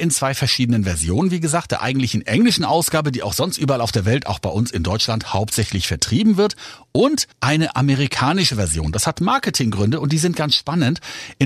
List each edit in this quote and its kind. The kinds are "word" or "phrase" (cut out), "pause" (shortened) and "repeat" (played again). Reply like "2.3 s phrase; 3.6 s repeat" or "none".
7.3 s pause